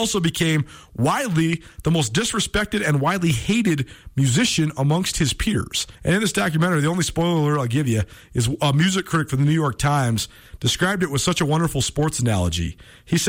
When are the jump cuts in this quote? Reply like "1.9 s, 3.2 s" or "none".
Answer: 5.9 s

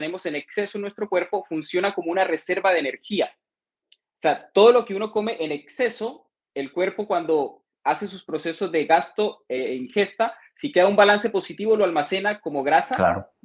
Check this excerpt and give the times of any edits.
none

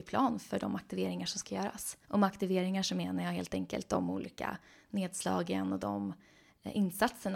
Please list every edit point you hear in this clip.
2.0 s

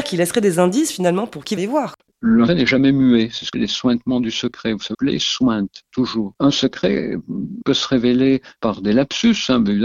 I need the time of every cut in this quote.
1.6 s, 2.5 s, 3.5 s, 4.9 s, 7.6 s, 8.6 s

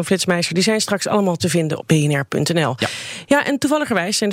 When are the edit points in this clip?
1.4 s, 1.8 s

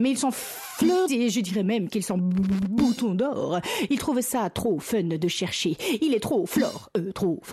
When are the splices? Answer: 1.1 s

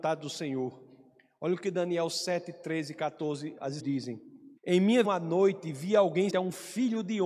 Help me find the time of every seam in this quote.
3.8 s, 4.6 s, 5.0 s, 6.3 s

